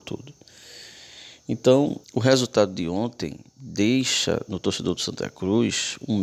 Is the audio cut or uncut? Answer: cut